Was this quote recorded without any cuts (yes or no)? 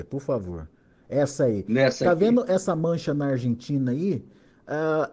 yes